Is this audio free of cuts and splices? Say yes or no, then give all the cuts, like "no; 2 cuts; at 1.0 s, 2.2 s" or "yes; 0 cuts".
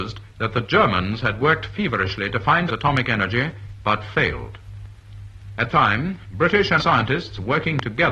no; 3 cuts; at 2.7 s, 5.7 s, 6.8 s